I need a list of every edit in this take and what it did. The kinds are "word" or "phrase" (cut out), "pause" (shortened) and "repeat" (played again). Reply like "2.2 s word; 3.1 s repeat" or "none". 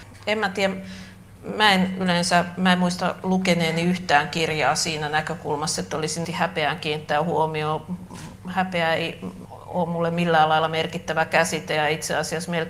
6.2 s word